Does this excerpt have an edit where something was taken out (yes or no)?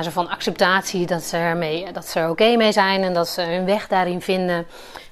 no